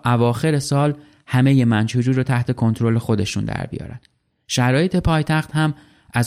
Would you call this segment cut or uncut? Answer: uncut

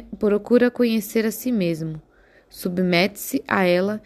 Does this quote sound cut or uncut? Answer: uncut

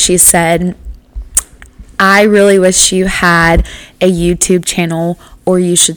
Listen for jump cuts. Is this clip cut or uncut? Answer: uncut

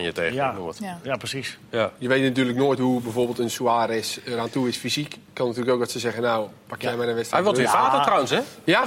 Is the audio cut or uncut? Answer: uncut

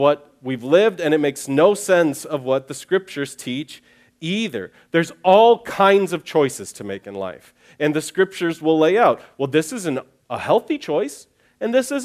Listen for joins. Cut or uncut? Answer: uncut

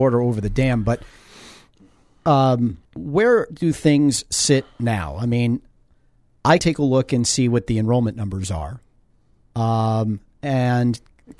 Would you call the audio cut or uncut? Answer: cut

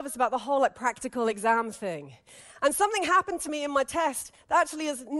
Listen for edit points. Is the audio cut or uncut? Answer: uncut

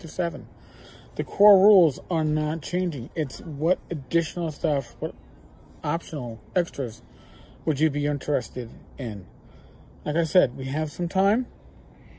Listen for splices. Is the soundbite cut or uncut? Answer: uncut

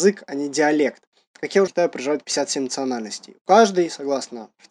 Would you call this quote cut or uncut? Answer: cut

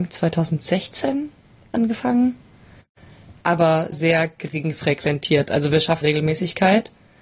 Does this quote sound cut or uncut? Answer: cut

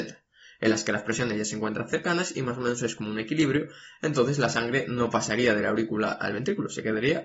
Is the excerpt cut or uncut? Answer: uncut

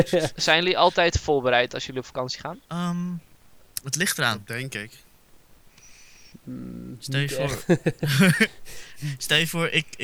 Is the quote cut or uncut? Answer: cut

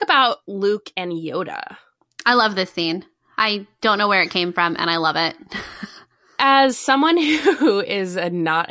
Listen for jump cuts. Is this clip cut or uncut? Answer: uncut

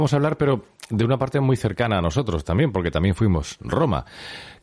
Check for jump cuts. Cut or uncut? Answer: uncut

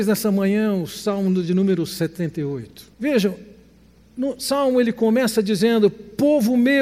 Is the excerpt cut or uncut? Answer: cut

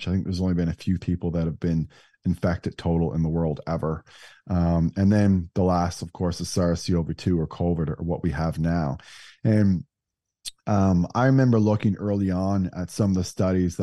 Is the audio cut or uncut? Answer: cut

